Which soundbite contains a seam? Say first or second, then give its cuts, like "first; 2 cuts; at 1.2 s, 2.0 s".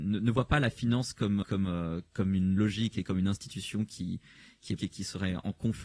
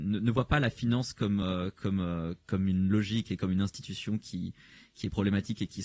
first; 2 cuts; at 1.4 s, 4.8 s